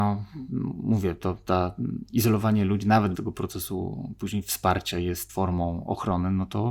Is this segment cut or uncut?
cut